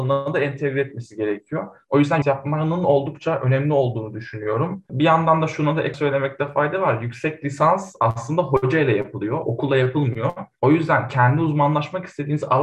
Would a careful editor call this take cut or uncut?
cut